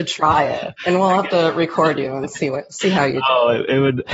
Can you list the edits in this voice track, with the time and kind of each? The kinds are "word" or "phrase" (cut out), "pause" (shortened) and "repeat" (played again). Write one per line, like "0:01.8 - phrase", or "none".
none